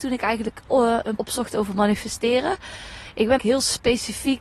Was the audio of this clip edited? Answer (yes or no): yes